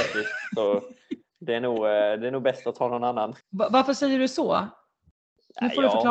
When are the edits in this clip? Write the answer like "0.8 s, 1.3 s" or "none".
3.4 s